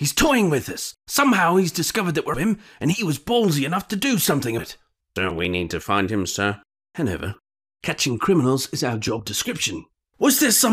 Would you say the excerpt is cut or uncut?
cut